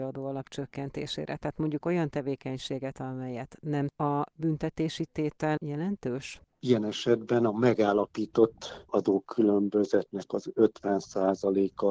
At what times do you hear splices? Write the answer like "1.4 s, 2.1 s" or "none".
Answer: 1.8 s, 3.9 s, 5.6 s, 8.9 s